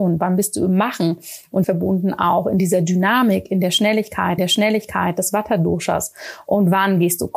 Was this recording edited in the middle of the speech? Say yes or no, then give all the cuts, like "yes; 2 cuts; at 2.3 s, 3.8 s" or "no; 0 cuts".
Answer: yes; 2 cuts; at 1.6 s, 4.4 s